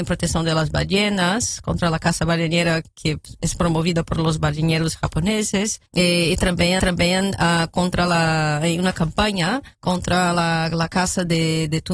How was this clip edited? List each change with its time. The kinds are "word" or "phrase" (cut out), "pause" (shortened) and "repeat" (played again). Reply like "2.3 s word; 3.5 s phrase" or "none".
5.9 s pause; 6.8 s repeat; 9.7 s pause